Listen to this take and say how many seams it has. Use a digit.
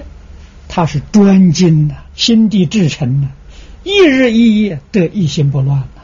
1